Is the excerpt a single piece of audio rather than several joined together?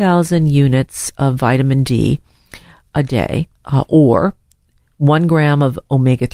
no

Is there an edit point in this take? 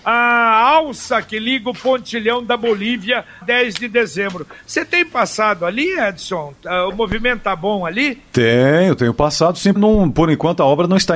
yes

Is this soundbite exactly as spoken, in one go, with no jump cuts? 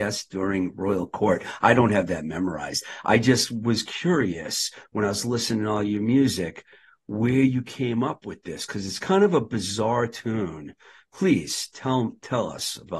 yes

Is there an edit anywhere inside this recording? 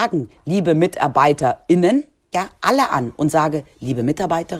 yes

